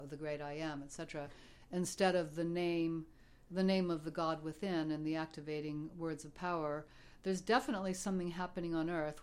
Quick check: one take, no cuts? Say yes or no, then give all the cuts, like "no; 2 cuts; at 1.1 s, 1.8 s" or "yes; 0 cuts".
yes; 0 cuts